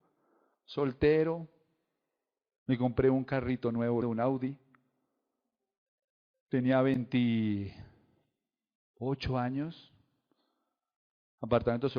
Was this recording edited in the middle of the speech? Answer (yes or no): yes